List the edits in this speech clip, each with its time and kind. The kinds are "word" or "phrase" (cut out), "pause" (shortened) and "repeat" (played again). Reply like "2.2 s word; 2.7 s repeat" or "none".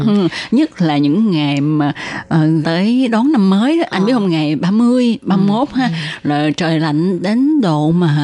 2.6 s word